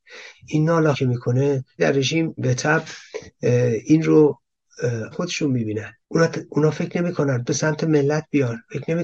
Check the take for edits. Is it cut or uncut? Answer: cut